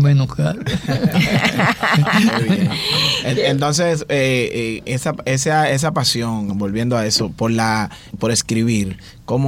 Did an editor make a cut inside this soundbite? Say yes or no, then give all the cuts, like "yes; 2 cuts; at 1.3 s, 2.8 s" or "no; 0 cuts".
yes; 1 cut; at 8.1 s